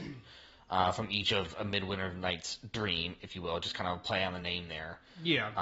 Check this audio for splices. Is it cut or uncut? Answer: uncut